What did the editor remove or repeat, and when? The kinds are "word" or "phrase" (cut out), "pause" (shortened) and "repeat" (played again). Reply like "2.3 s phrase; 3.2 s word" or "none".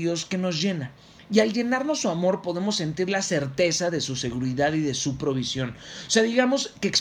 none